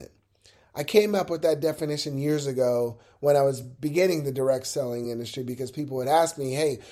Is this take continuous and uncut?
yes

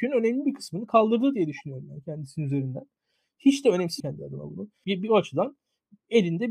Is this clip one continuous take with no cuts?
no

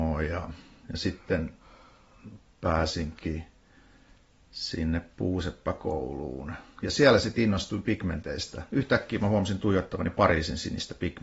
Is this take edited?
no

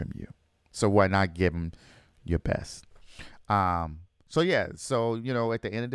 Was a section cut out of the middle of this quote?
no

